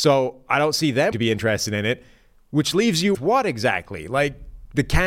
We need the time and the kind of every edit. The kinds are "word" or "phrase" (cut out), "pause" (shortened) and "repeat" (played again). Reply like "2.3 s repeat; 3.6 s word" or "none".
1.1 s word; 3.1 s word